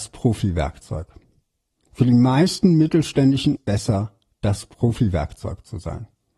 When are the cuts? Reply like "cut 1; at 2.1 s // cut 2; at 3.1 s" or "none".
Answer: cut 1; at 3.6 s